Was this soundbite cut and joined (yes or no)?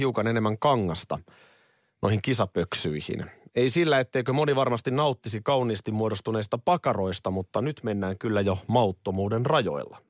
no